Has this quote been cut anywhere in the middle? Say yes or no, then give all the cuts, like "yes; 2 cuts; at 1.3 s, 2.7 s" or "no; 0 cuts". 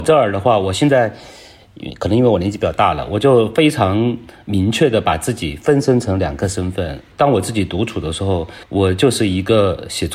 yes; 1 cut; at 8.6 s